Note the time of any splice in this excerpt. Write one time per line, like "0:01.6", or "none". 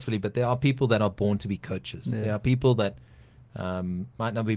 none